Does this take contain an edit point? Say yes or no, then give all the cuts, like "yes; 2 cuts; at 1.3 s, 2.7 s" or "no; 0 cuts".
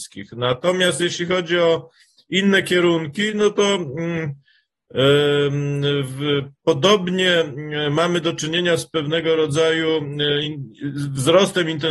no; 0 cuts